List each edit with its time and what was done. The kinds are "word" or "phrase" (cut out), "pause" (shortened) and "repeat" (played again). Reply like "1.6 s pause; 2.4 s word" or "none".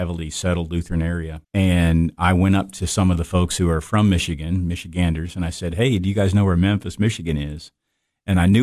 1.4 s pause